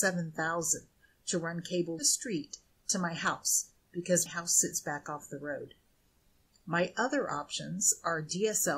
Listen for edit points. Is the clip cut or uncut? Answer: cut